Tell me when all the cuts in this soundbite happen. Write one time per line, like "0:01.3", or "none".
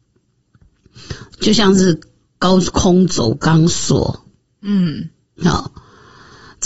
none